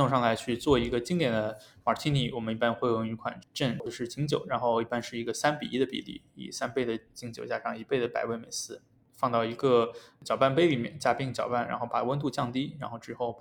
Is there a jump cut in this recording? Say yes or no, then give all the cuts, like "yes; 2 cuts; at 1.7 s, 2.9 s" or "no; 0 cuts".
no; 0 cuts